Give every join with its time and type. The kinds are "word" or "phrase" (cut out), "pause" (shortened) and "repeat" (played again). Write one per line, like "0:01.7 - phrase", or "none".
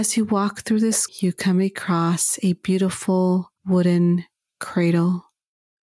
0:01.1 - word
0:03.6 - pause